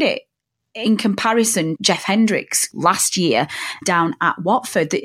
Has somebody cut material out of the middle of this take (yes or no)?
yes